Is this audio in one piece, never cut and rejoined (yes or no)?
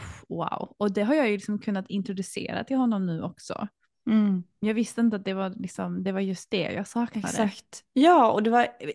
yes